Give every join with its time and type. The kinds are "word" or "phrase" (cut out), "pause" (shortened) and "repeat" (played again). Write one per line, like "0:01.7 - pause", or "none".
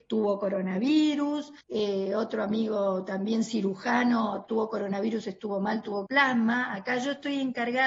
0:01.6 - pause
0:06.1 - phrase